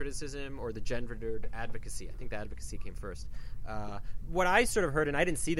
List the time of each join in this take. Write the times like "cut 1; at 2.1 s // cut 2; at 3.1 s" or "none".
cut 1; at 4.3 s